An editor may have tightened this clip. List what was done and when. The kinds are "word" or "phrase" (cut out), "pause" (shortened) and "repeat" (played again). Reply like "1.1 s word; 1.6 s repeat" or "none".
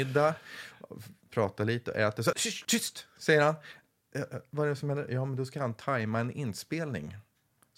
2.3 s word; 2.6 s word